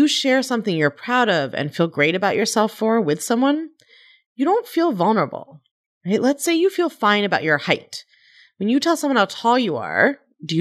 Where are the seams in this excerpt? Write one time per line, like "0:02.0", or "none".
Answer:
none

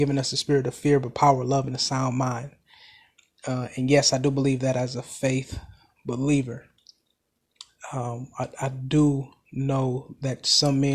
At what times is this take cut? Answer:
none

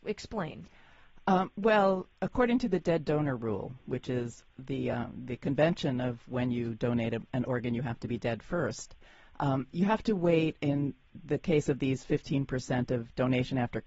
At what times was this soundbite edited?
none

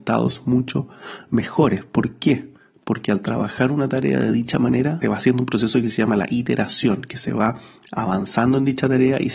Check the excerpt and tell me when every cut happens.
0:05.0

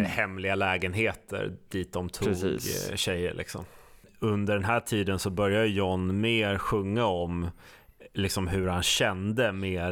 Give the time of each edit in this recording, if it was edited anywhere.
none

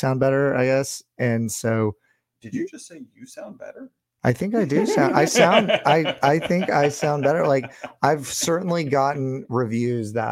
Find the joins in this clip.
none

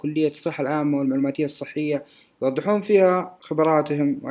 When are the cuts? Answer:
none

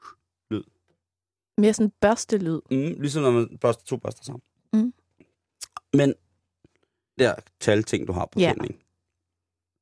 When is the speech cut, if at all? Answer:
0:07.2

